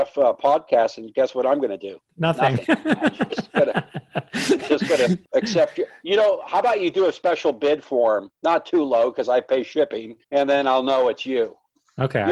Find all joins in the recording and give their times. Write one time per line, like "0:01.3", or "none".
0:05.2
0:08.3
0:10.2